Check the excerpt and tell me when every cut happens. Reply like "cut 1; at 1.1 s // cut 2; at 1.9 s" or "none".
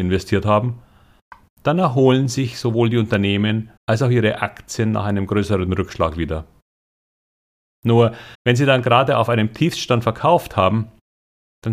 cut 1; at 3.8 s // cut 2; at 8.3 s

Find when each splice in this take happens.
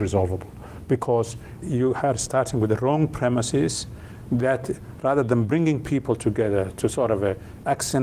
cut 1; at 1.6 s

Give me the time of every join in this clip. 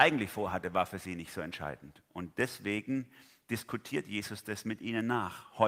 none

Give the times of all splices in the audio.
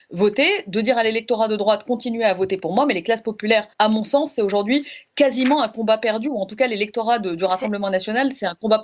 cut 1; at 3.7 s

